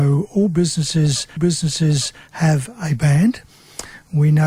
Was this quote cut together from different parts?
yes; 1 cut; at 1.4 s

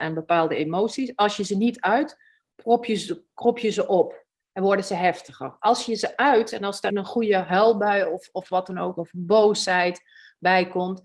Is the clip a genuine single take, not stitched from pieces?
no; 1 cut; at 6.9 s

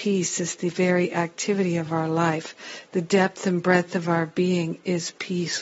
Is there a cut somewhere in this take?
no; 0 cuts

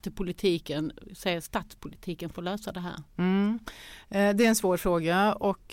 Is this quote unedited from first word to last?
yes; 0 cuts

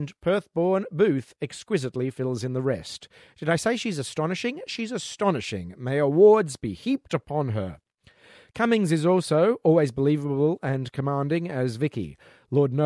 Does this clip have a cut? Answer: no; 0 cuts

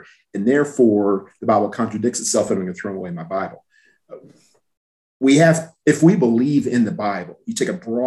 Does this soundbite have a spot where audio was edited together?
no; 0 cuts

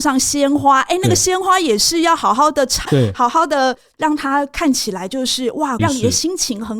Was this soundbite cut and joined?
yes; 2 cuts; at 2.9 s, 5.8 s

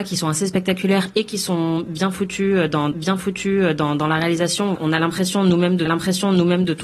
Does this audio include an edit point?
yes; 3 cuts; at 2.9 s, 4.8 s, 5.9 s

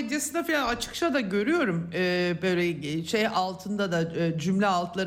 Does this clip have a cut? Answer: no; 0 cuts

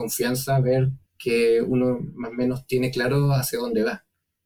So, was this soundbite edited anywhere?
yes; 1 cut; at 1.1 s

